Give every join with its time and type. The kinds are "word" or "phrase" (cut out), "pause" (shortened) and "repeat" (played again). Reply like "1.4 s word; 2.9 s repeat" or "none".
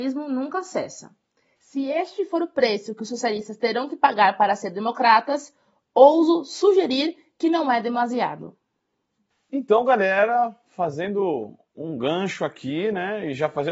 none